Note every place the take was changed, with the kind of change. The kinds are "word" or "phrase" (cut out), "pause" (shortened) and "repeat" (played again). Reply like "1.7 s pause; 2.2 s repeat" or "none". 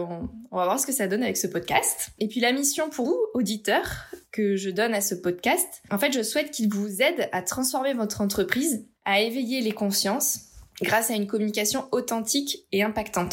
3.0 s word